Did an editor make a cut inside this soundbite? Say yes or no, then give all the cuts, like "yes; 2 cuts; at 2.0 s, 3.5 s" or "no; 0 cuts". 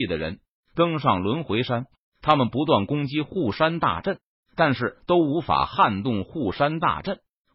no; 0 cuts